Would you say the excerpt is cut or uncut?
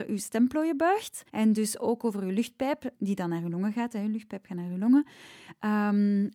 cut